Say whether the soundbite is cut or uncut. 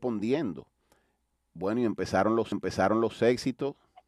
cut